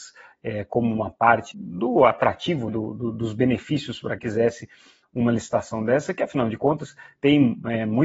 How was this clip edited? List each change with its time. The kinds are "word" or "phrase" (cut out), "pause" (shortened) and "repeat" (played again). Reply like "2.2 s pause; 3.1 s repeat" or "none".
1.5 s word; 2.7 s word; 4.2 s word; 5.0 s word